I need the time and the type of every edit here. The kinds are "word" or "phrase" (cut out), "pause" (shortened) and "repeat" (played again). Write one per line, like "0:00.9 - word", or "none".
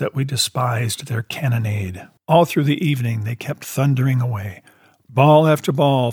0:02.2 - pause